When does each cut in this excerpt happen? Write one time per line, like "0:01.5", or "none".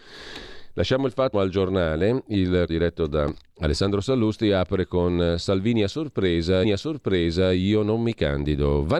0:01.3
0:02.7
0:06.6